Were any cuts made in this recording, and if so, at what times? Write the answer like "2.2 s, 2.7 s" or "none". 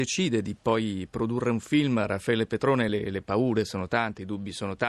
none

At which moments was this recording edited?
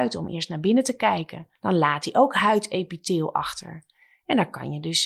1.6 s

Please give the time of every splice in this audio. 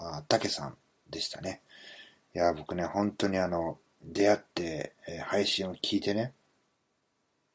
none

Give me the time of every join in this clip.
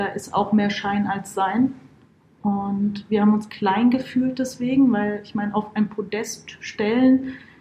none

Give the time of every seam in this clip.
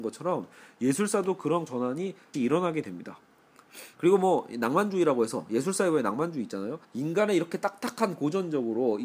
1.7 s, 2.3 s, 3.9 s, 6.8 s

